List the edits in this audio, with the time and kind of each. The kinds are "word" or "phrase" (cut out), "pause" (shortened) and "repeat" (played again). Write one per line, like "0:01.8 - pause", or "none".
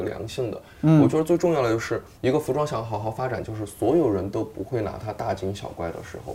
0:02.2 - pause